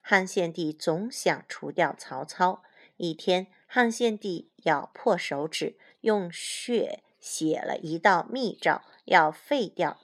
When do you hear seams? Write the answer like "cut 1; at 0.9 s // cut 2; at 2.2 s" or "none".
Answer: none